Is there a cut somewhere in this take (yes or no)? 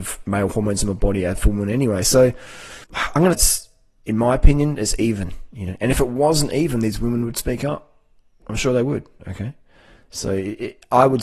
yes